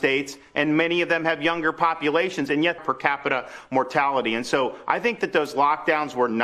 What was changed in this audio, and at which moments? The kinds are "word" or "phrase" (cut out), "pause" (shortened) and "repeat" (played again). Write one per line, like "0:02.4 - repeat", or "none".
0:02.8 - phrase